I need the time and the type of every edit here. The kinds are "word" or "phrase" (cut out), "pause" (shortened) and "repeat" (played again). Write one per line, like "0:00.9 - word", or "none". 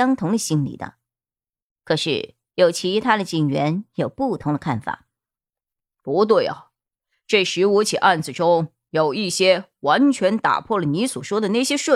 none